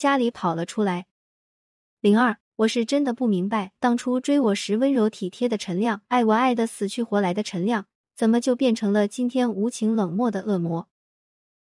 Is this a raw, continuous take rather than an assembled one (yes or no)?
no